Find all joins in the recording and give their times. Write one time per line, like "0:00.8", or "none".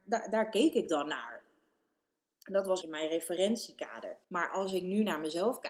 0:02.8
0:04.2